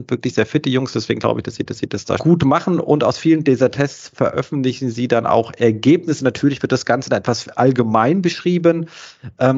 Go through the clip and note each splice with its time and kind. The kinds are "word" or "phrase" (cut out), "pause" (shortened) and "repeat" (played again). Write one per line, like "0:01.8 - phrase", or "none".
0:01.7 - repeat
0:02.2 - word